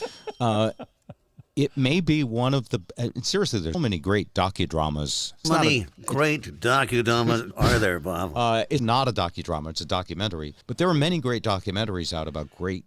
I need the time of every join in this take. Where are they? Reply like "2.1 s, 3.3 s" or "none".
3.7 s, 5.4 s, 7.5 s, 8.8 s, 10.6 s